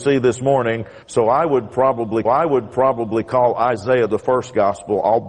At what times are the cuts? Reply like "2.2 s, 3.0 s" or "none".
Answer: 1.0 s, 2.3 s